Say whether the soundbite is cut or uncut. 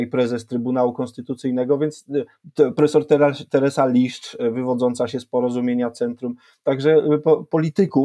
uncut